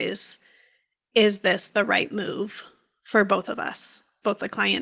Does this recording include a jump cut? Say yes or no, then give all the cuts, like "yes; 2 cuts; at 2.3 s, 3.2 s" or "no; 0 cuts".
no; 0 cuts